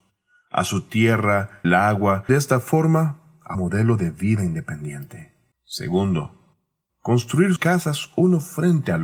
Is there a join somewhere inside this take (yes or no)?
yes